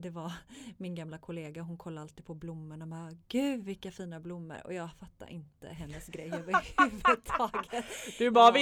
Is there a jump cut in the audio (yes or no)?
no